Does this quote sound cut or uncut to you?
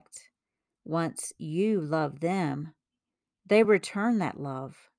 uncut